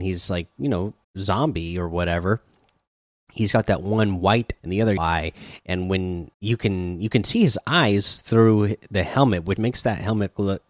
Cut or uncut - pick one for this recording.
cut